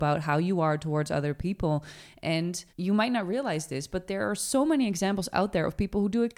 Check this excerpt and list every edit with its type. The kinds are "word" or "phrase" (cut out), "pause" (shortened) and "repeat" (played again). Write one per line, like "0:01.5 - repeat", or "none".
0:02.7 - pause

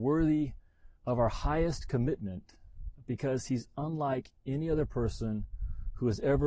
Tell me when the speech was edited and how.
0:01.0 - pause

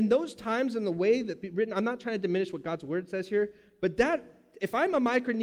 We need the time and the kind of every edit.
none

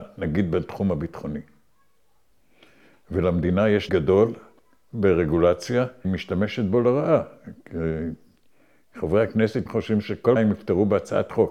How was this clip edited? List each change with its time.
0:03.9 - word
0:06.0 - word
0:09.7 - word
0:10.4 - word

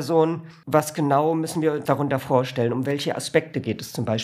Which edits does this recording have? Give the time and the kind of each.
0:01.9 - word

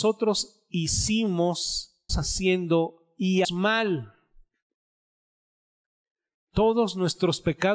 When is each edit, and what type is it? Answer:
0:02.1 - word
0:03.4 - word

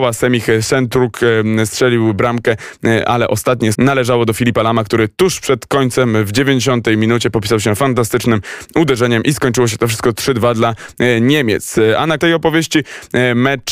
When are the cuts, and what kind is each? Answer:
0:03.7 - word
0:12.2 - word

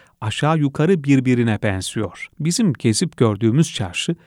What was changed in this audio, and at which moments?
0:02.3 - pause

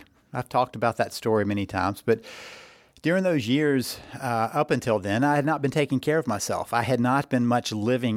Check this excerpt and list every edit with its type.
none

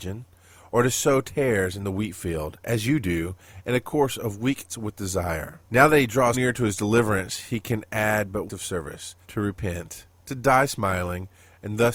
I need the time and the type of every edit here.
0:04.7 - word
0:05.6 - pause
0:06.3 - word
0:08.5 - phrase
0:09.2 - pause

